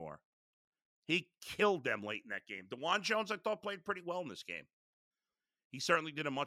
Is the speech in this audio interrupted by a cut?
no; 0 cuts

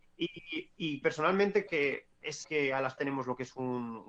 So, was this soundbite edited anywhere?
yes; 4 cuts; at 1.0 s, 1.7 s, 2.4 s, 3.0 s

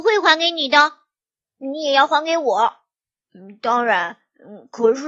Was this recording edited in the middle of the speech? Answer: no; 0 cuts

